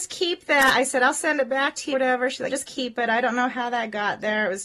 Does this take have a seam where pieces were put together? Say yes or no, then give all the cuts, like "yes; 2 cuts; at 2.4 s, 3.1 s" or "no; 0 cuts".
yes; 2 cuts; at 1.9 s, 2.5 s